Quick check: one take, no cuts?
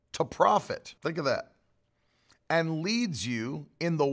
no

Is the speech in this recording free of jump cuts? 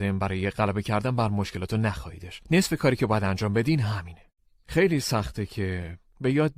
yes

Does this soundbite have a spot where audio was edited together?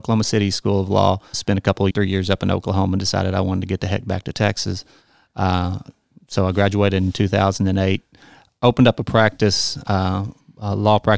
yes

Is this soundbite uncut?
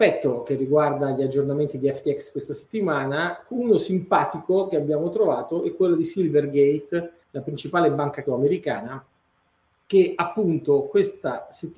no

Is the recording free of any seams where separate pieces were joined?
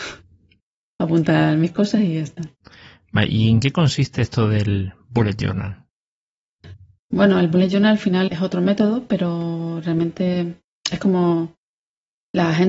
no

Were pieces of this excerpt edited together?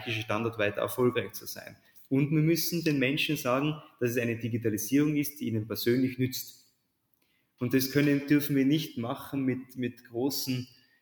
no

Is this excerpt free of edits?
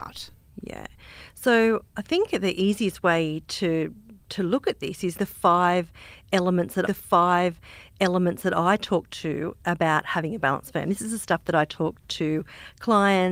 no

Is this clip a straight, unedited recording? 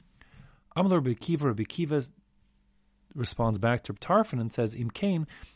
yes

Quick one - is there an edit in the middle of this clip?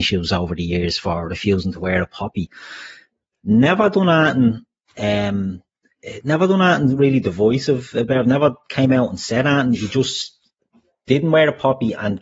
no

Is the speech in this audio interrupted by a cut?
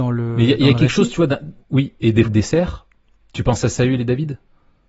yes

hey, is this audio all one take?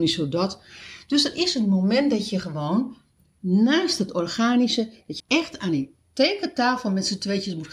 no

